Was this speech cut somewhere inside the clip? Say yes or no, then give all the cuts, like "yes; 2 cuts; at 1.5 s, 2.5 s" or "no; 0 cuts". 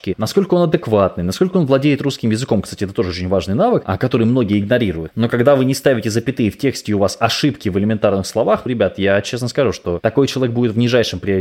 yes; 1 cut; at 8.7 s